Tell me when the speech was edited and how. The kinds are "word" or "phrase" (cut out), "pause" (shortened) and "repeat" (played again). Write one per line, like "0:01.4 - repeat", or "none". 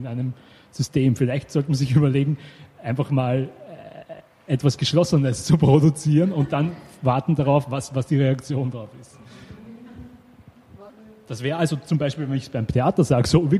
none